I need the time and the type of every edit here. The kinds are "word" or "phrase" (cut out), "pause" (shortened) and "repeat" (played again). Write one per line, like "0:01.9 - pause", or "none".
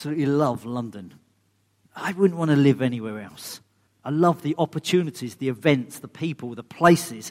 0:03.9 - pause